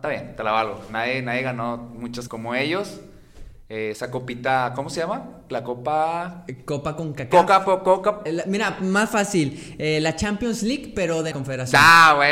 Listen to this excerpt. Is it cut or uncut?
cut